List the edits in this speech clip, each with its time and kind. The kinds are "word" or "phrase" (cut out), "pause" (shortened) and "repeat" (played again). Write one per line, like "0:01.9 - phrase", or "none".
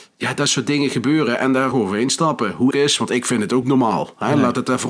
0:01.7 - phrase
0:02.7 - phrase
0:03.6 - word